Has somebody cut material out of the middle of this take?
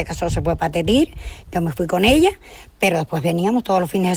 no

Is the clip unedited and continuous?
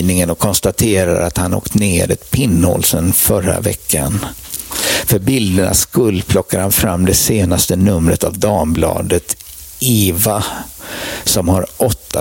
yes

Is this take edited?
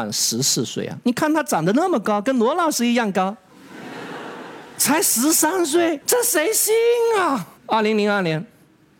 yes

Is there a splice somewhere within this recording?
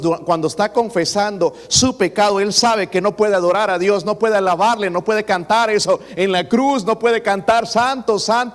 no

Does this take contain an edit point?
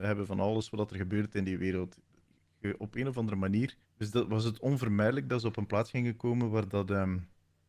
yes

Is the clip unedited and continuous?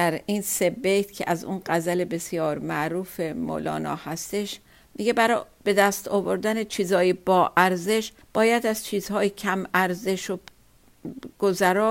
no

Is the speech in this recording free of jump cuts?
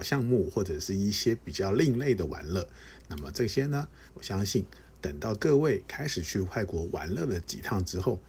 no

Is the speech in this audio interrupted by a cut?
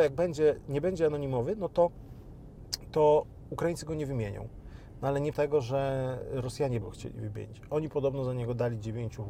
yes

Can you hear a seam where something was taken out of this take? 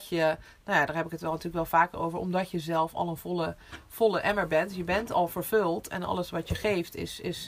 no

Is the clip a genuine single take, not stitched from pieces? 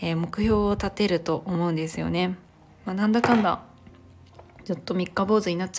yes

